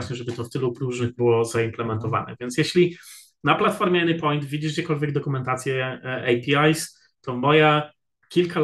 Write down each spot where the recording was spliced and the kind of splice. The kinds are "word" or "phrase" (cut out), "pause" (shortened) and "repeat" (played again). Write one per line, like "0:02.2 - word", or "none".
0:01.2 - word